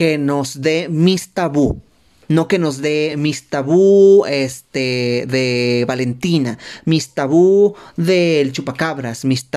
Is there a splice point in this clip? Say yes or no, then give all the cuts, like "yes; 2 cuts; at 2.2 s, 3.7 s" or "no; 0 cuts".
no; 0 cuts